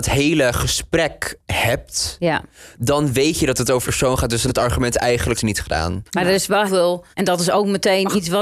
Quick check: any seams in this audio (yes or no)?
yes